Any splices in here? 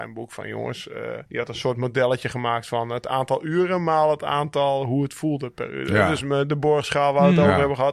yes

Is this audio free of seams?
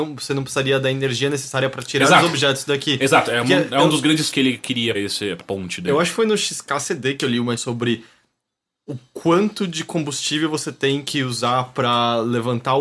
no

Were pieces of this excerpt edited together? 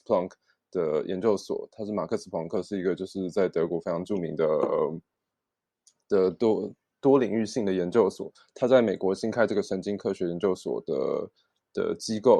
no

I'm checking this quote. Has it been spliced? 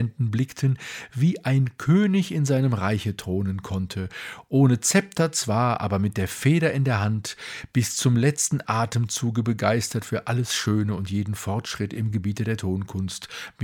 no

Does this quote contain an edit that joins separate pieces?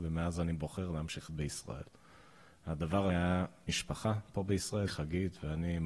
yes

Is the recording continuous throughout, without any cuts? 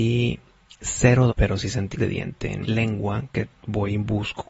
no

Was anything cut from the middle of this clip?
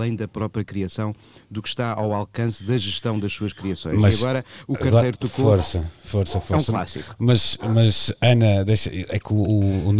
no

